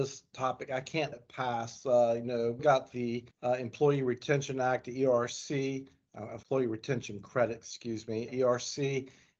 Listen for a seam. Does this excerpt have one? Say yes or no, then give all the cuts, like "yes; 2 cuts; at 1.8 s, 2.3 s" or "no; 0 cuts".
yes; 5 cuts; at 1.1 s, 2.6 s, 3.3 s, 6.4 s, 8.3 s